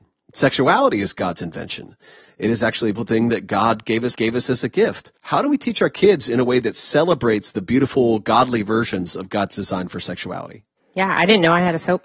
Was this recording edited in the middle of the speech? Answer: yes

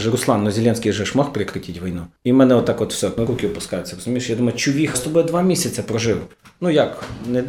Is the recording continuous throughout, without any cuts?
no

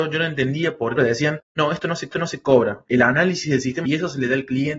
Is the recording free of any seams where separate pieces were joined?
no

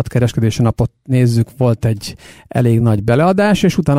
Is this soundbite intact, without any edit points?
yes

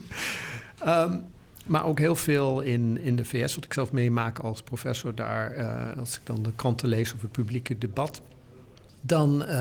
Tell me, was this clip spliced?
no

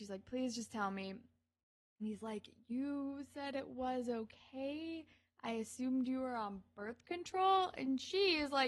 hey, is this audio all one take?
yes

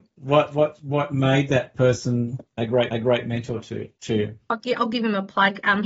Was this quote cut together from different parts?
yes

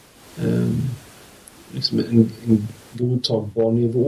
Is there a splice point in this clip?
yes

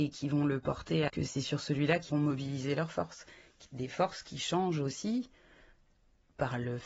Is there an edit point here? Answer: yes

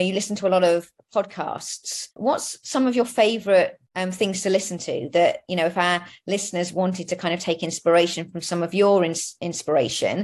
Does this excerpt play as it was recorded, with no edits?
no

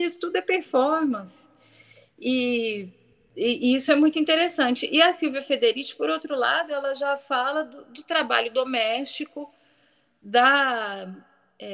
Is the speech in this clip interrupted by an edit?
no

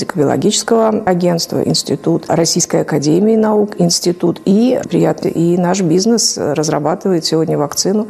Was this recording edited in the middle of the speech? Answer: yes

